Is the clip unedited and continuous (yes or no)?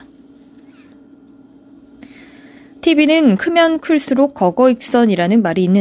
yes